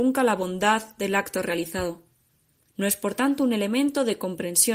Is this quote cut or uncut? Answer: cut